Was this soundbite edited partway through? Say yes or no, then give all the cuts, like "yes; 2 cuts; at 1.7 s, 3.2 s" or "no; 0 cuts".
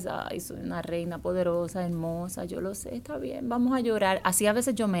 no; 0 cuts